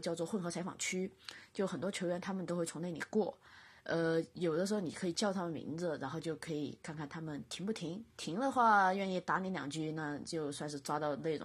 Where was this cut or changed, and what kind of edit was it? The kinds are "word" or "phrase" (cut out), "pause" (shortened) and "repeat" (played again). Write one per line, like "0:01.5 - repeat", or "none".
0:08.1 - pause